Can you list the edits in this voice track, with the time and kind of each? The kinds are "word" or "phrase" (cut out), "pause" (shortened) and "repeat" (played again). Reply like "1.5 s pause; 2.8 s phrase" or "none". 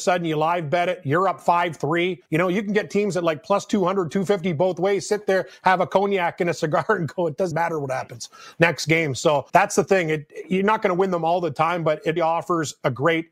2.3 s pause; 7.5 s word; 9.5 s pause; 12.2 s word